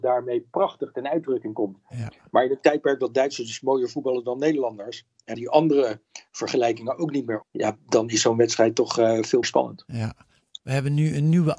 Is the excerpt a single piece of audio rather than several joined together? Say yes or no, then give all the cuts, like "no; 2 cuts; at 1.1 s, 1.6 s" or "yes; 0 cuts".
no; 3 cuts; at 5.3 s, 7.4 s, 9.4 s